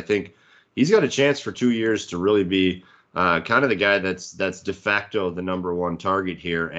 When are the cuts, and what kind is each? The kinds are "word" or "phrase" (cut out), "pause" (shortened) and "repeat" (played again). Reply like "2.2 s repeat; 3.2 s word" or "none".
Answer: none